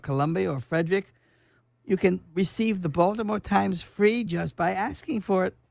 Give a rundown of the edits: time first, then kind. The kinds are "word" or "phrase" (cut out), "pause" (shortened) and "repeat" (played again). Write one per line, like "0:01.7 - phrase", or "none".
none